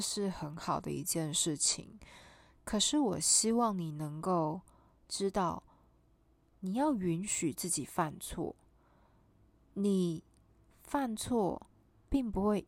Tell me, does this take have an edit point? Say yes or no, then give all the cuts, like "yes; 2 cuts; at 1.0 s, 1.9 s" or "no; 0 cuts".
no; 0 cuts